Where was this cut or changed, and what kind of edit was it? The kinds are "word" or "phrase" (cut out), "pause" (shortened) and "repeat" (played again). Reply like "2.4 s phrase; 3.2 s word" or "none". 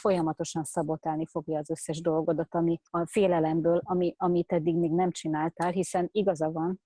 2.9 s pause